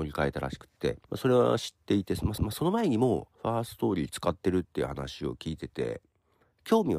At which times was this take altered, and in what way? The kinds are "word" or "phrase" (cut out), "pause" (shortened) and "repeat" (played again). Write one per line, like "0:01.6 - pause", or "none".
0:01.0 - pause
0:02.4 - repeat
0:03.3 - pause